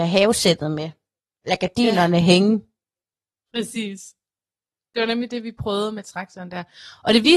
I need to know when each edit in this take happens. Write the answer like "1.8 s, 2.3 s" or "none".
none